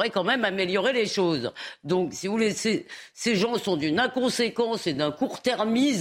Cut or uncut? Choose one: uncut